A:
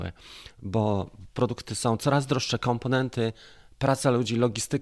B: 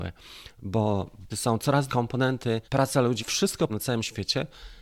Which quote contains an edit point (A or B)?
B